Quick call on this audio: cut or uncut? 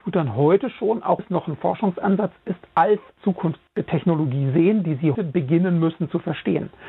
cut